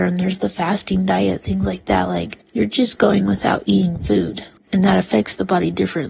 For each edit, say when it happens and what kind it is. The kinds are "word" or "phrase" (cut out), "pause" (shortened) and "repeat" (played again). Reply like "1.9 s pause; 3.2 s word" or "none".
2.4 s pause; 4.6 s word